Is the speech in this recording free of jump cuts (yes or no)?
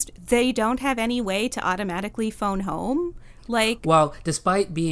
yes